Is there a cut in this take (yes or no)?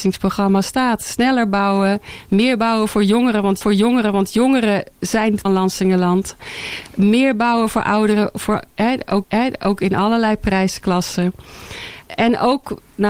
yes